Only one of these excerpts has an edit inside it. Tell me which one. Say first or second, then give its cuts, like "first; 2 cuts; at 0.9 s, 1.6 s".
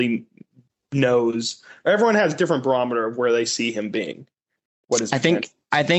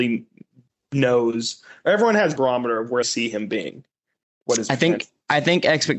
second; 2 cuts; at 2.4 s, 3.0 s